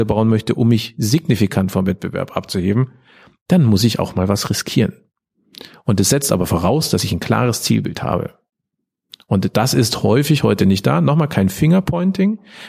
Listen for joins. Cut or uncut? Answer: uncut